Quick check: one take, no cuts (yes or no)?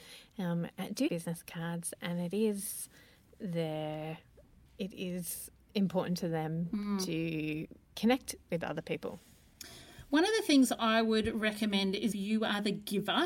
no